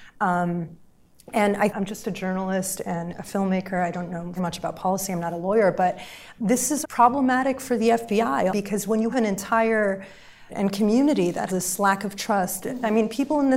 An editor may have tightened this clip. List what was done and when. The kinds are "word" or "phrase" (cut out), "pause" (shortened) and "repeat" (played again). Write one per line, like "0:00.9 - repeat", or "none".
0:01.7 - word
0:04.4 - word
0:06.4 - word
0:06.8 - word
0:08.5 - word
0:09.1 - word
0:10.5 - word
0:11.5 - word